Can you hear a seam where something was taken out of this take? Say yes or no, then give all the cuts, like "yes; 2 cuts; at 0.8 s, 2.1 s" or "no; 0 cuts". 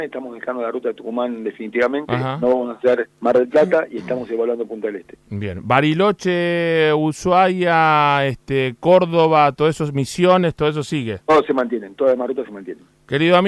yes; 1 cut; at 3.1 s